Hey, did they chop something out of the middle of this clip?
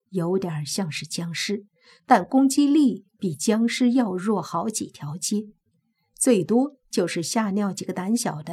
no; 0 cuts

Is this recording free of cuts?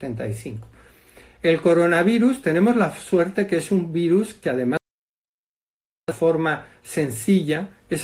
no; 1 cut; at 6.1 s

